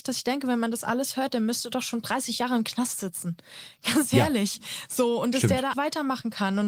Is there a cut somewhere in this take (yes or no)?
yes